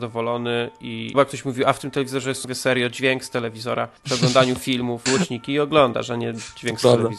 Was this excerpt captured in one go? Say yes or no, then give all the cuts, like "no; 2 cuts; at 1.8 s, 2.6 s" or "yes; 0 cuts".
no; 4 cuts; at 1.1 s, 2.4 s, 4.0 s, 5.1 s